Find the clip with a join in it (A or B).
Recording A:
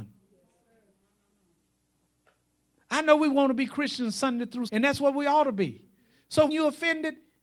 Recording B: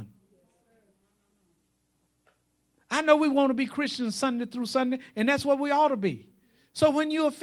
A